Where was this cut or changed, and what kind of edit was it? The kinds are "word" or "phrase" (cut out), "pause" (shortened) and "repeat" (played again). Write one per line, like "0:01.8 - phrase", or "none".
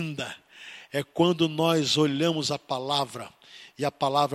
none